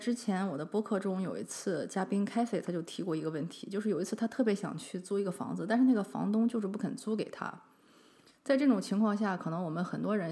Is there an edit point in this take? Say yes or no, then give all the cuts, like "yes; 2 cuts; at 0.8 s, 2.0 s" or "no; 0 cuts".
no; 0 cuts